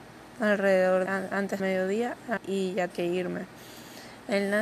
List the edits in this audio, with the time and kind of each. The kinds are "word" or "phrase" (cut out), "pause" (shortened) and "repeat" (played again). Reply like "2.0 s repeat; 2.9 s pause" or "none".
1.1 s word; 1.6 s word; 2.4 s word; 2.9 s word